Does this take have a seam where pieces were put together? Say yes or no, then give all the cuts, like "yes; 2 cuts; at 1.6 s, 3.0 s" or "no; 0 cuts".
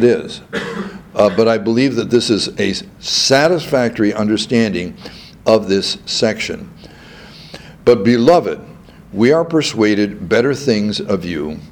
no; 0 cuts